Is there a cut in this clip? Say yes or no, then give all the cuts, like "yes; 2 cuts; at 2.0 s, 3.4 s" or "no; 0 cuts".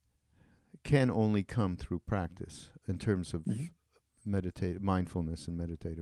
no; 0 cuts